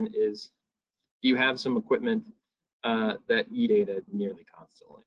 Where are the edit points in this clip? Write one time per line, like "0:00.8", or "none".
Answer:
0:03.7